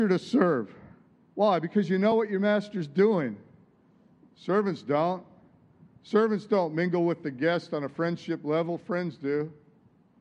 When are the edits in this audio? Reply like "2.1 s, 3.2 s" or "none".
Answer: none